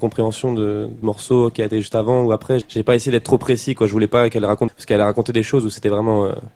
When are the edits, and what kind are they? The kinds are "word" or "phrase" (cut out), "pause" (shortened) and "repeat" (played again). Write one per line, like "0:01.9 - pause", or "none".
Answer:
0:01.0 - word
0:02.6 - word
0:04.7 - word

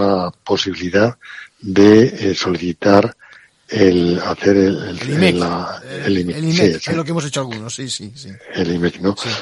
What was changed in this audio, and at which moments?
none

